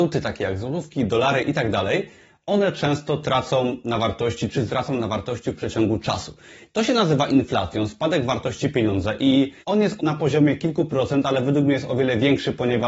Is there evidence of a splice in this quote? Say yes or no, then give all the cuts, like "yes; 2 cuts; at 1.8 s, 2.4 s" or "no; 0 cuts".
yes; 3 cuts; at 4.7 s, 9.6 s, 10.0 s